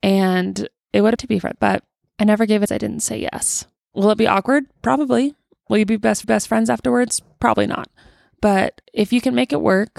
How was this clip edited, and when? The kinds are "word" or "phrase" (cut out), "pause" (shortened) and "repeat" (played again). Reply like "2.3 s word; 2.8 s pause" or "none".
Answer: 1.2 s phrase; 1.5 s phrase; 2.7 s phrase; 6.2 s repeat; 8.8 s pause